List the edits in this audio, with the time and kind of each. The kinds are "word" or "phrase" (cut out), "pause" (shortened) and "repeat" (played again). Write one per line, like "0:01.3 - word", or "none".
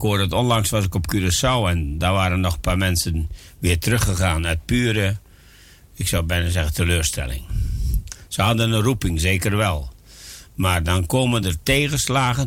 none